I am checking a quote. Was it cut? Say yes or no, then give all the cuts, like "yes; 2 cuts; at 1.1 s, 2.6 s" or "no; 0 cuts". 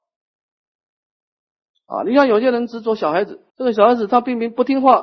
yes; 1 cut; at 3.5 s